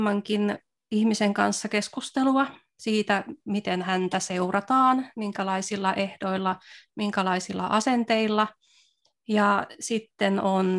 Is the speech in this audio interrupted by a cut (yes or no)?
no